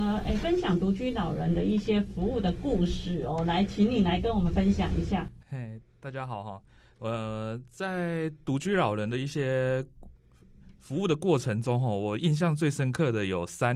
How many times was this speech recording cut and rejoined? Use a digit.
0